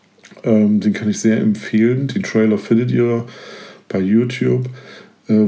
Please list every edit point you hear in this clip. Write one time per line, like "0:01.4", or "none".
none